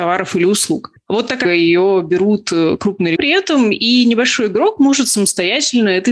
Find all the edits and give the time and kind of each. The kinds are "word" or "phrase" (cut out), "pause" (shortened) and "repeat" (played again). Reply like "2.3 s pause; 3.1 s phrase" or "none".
1.4 s phrase; 3.2 s phrase